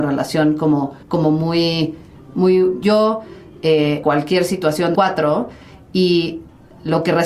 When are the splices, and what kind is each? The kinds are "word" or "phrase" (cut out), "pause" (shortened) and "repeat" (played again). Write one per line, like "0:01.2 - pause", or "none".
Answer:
0:01.0 - pause
0:02.8 - phrase
0:04.0 - phrase
0:04.9 - phrase